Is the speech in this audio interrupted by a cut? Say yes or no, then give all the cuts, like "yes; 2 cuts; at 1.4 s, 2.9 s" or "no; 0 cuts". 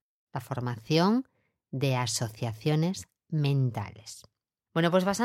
no; 0 cuts